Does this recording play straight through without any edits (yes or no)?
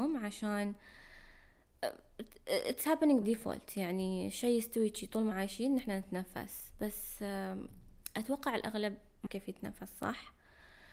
no